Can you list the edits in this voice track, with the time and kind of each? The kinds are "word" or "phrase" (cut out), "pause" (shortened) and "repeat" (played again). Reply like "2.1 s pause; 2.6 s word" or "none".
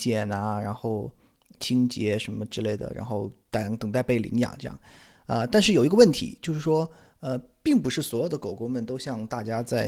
none